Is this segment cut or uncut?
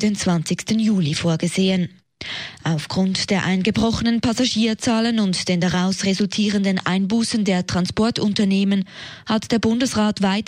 uncut